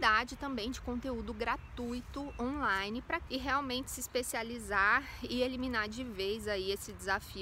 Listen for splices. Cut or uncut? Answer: cut